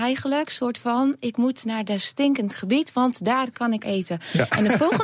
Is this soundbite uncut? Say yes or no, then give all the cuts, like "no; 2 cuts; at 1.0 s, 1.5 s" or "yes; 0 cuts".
no; 1 cut; at 3.8 s